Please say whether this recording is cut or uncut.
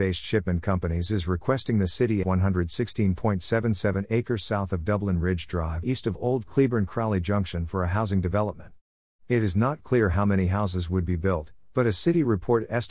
cut